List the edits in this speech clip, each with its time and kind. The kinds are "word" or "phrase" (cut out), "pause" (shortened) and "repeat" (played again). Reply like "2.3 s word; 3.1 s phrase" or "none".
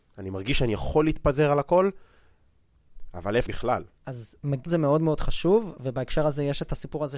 3.5 s phrase; 4.7 s word